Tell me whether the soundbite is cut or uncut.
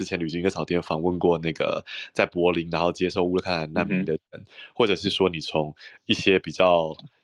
cut